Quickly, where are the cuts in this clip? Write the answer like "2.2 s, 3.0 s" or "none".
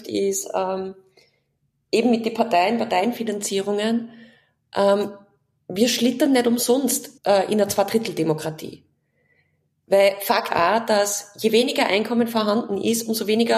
7.2 s, 10.5 s